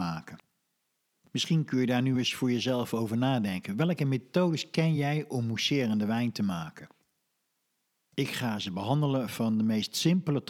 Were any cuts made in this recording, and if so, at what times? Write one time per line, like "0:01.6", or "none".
none